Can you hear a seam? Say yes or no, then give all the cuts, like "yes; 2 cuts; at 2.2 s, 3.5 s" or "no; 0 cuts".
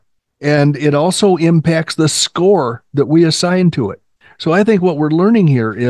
no; 0 cuts